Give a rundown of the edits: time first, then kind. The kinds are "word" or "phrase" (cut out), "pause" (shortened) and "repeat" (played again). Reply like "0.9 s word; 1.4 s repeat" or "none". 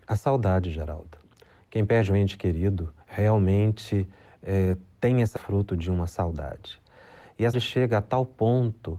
3.0 s pause; 5.4 s word; 7.5 s word